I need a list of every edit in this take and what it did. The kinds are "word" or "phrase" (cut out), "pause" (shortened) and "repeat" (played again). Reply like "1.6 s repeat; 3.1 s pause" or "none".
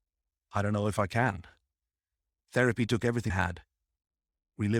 3.3 s word

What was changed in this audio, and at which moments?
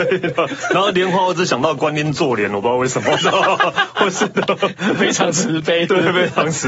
none

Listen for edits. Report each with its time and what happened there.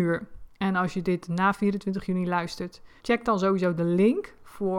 3.0 s pause

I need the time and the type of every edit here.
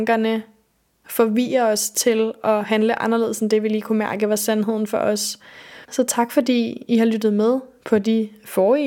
5.8 s pause

